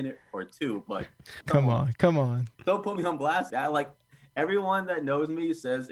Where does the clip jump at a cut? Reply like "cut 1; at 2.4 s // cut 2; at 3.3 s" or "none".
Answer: cut 1; at 1.4 s // cut 2; at 2.5 s // cut 3; at 3.5 s

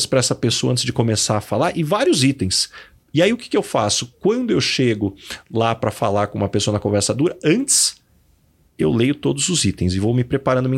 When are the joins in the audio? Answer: none

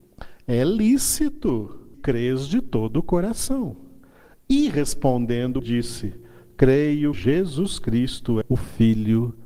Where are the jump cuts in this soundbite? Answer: cut 1; at 1.9 s // cut 2; at 5.6 s // cut 3; at 7.1 s // cut 4; at 8.4 s

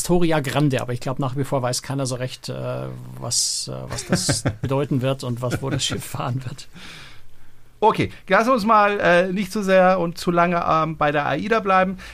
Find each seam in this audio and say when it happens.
cut 1; at 7.8 s

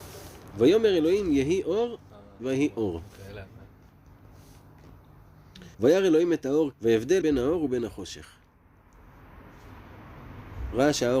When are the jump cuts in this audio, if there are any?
cut 1; at 5.7 s // cut 2; at 6.7 s // cut 3; at 7.2 s

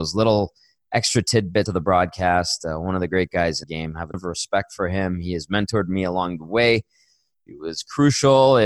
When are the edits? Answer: cut 1; at 1.7 s // cut 2; at 3.6 s // cut 3; at 4.1 s

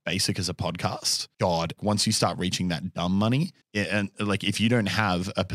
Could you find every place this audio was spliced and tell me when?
cut 1; at 1.8 s // cut 2; at 3.6 s

